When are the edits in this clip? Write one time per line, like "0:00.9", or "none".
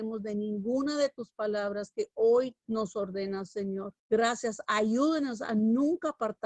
0:02.6
0:04.0